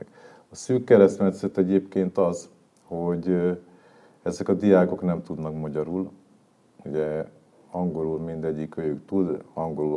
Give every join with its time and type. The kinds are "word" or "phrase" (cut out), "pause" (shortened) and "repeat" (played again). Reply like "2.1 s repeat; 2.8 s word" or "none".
none